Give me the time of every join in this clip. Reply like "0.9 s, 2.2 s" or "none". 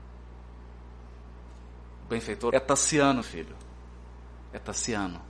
2.5 s, 3.2 s

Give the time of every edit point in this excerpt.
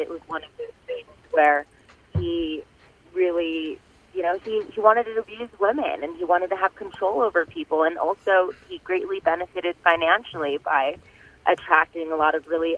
none

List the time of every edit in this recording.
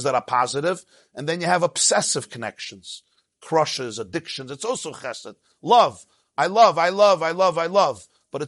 none

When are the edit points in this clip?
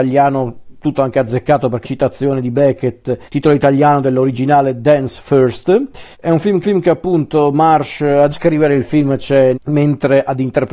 0.9 s, 1.8 s, 3.3 s, 6.1 s, 6.6 s, 8.3 s, 9.5 s

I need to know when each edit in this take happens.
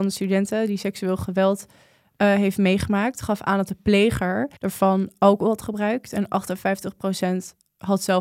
4.6 s

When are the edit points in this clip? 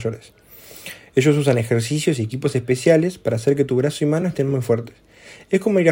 none

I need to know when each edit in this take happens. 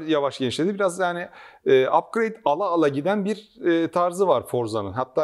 none

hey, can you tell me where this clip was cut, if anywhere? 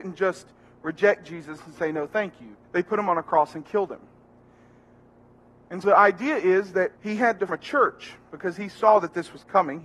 2.6 s, 5.8 s, 7.0 s, 7.5 s

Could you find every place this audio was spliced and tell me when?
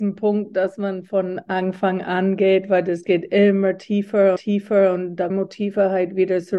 4.4 s, 5.3 s

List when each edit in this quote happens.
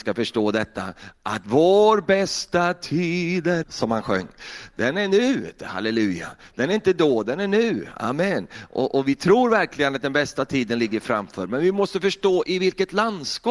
3.6 s

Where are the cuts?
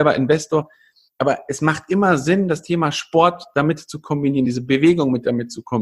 none

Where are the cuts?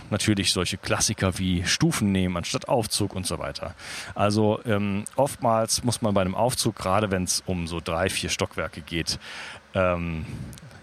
none

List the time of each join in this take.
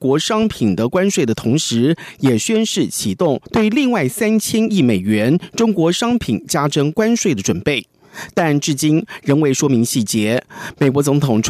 3.5 s

